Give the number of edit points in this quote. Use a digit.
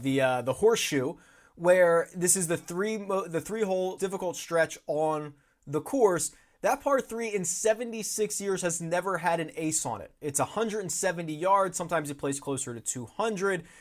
1